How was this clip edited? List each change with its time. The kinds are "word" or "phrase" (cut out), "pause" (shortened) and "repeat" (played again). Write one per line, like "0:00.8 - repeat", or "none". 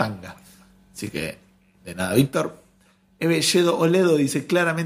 none